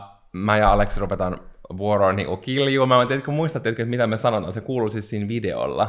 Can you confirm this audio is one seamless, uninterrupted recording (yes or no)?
yes